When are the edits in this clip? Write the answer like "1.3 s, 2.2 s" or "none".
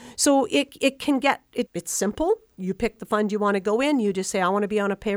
1.7 s